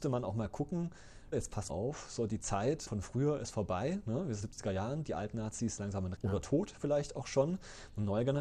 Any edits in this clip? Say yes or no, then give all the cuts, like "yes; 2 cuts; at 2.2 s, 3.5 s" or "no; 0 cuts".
yes; 6 cuts; at 1.3 s, 1.7 s, 2.9 s, 4.4 s, 5.8 s, 6.2 s